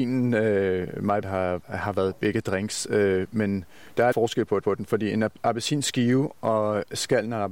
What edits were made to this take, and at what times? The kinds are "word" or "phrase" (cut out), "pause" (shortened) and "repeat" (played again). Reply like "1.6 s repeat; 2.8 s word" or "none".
1.2 s word; 1.6 s word; 4.1 s word; 4.6 s repeat